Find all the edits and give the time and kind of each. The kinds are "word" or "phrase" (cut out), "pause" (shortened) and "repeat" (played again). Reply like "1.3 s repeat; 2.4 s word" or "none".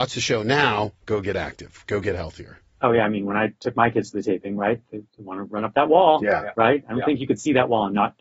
1.0 s pause; 5.1 s pause